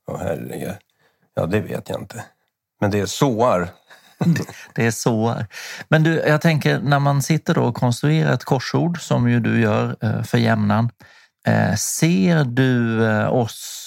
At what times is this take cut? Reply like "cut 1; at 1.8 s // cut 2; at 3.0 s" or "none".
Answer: none